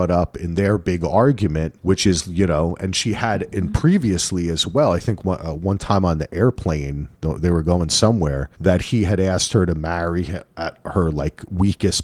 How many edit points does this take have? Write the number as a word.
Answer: two